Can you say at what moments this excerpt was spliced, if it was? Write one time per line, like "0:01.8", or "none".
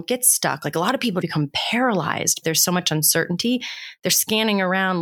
0:01.2
0:02.4

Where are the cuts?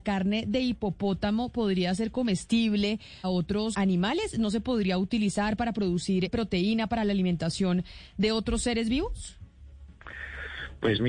0:03.2
0:03.7
0:06.3

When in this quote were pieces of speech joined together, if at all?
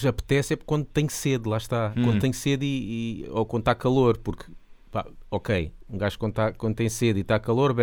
none

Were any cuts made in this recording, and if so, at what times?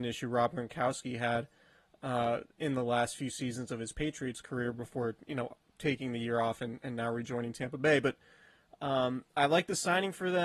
none

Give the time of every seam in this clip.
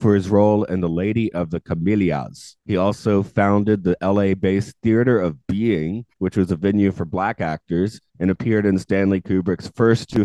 0:02.6
0:06.1
0:08.1

